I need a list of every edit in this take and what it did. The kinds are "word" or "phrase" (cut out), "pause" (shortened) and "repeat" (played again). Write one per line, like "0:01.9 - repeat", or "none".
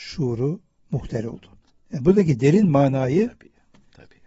0:01.6 - pause

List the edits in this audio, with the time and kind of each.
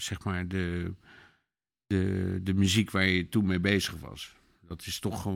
none

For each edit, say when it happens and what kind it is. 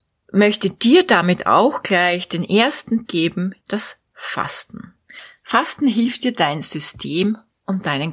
0:03.1 - word
0:03.6 - word

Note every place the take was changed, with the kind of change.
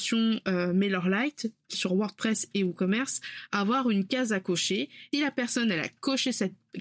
0:01.7 - word
0:05.1 - word

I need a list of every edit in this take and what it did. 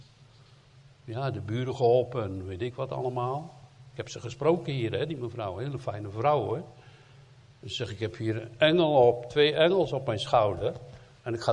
none

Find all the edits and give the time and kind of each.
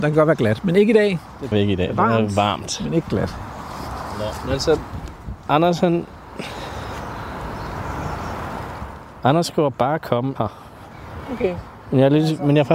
0:01.5 - phrase
0:10.4 - word

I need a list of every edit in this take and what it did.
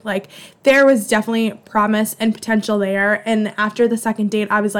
none

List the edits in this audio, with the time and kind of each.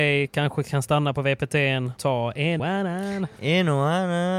0:02.0 - word
0:02.6 - word

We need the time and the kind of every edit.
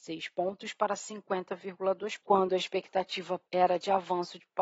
0:02.2 - word
0:03.5 - pause

